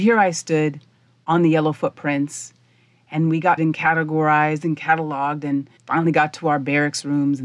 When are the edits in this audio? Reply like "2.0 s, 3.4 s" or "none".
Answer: 3.6 s, 5.8 s